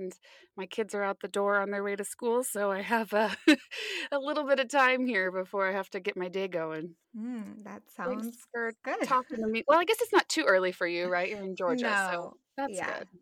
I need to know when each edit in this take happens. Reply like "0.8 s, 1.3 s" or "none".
7.0 s